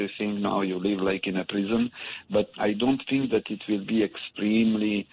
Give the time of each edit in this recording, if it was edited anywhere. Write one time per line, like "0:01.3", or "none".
none